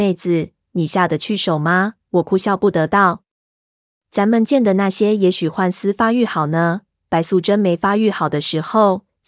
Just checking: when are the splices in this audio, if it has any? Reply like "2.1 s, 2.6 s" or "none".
none